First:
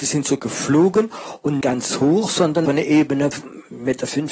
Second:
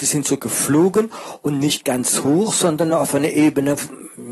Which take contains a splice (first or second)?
first